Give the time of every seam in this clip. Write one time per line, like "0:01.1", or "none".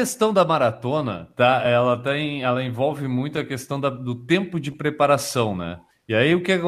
none